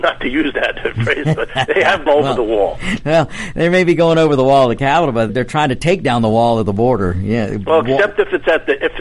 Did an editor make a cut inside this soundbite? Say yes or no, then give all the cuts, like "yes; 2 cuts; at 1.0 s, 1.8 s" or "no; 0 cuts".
yes; 2 cuts; at 2.1 s, 5.3 s